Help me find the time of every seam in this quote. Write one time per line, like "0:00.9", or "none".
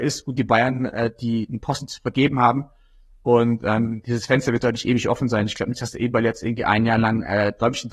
none